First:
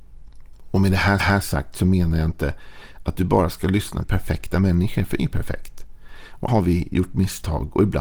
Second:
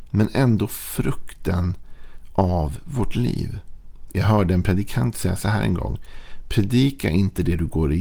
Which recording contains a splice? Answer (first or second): first